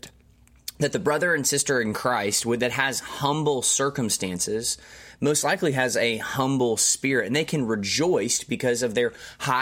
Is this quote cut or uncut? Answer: uncut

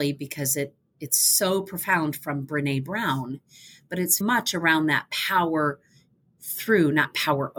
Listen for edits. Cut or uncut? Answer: cut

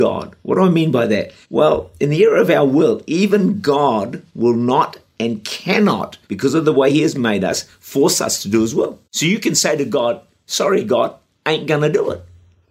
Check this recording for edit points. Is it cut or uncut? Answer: cut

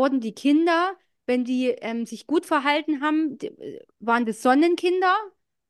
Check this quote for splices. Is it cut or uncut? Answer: uncut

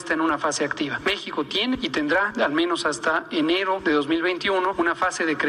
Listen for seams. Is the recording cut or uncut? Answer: uncut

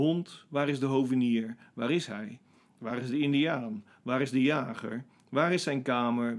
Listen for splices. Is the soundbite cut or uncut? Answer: uncut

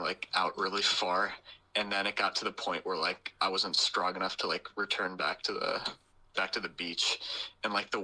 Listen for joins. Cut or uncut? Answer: uncut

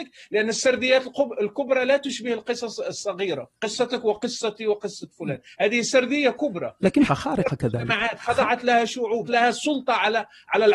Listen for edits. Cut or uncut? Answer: cut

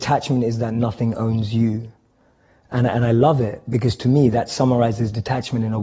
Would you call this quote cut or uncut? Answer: uncut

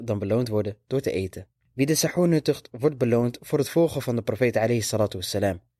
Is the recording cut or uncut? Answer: uncut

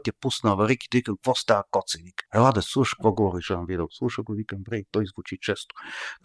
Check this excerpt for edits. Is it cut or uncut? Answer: cut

